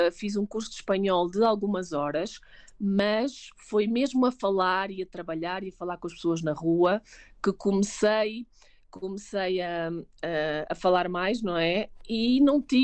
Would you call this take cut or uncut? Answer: uncut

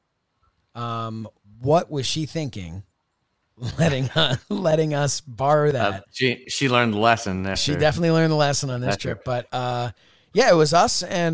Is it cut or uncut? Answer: cut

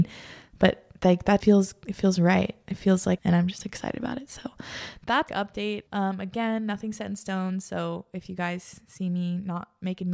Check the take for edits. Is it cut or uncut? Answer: cut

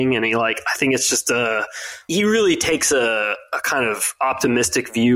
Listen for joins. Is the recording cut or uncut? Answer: uncut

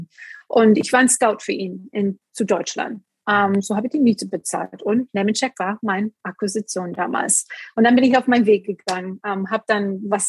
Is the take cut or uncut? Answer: uncut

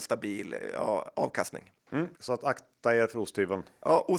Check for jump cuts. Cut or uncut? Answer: cut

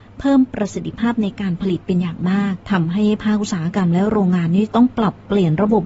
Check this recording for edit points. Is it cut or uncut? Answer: cut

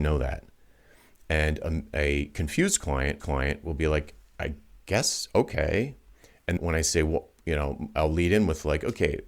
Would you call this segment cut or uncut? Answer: cut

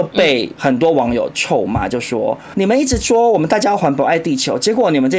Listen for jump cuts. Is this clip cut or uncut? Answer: cut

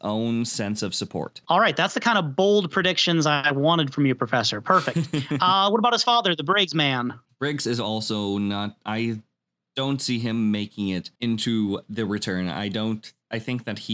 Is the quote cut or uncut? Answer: cut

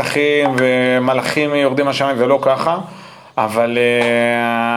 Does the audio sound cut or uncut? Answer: uncut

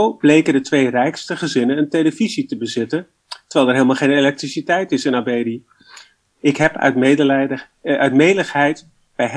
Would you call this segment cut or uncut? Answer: uncut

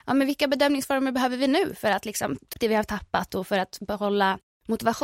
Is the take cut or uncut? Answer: cut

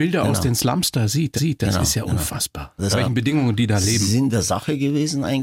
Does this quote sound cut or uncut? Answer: cut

